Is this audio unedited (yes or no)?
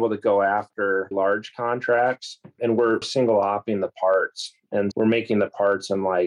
no